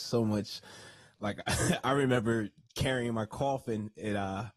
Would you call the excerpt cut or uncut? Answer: uncut